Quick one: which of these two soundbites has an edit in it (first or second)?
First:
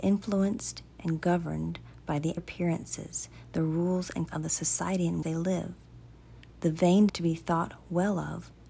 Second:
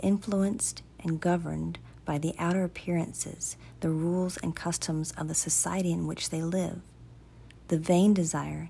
first